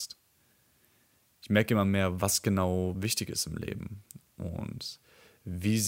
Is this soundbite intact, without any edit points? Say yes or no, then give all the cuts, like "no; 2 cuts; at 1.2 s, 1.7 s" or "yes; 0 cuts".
yes; 0 cuts